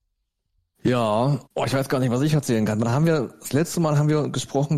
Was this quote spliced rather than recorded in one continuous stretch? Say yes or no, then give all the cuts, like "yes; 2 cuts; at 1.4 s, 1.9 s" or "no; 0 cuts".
yes; 1 cut; at 1.5 s